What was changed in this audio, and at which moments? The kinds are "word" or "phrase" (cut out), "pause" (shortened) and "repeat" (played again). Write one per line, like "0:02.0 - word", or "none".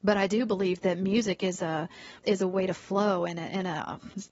0:02.2 - pause

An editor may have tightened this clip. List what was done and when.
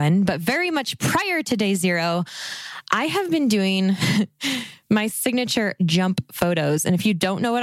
none

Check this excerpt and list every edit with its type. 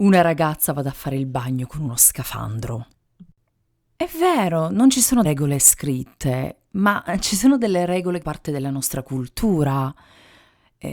0:05.2 - word
0:08.2 - word

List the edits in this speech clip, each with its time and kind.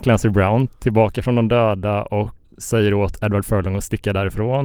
0:02.4 - word

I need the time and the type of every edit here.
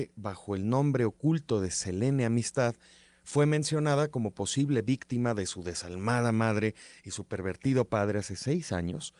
none

